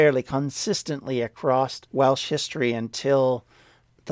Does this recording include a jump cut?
yes; 1 cut; at 1.9 s

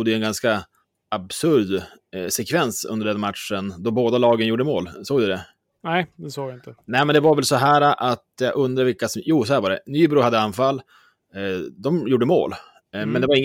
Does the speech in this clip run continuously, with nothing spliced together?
yes; 0 cuts

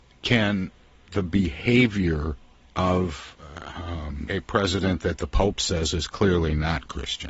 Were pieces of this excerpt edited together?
yes; 3 cuts; at 1.1 s, 2.6 s, 4.3 s

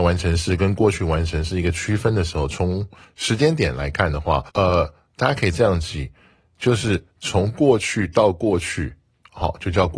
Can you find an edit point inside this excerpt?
yes; 1 cut; at 4.5 s

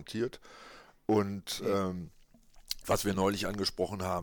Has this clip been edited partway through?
no; 0 cuts

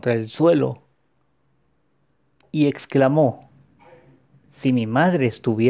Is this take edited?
no; 0 cuts

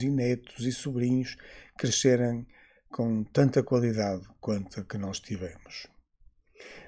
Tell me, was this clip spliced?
no; 0 cuts

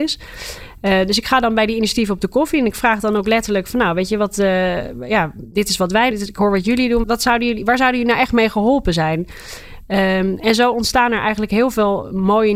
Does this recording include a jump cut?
yes; 2 cuts; at 6.1 s, 7.0 s

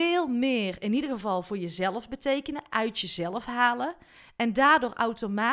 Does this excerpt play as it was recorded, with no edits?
yes; 0 cuts

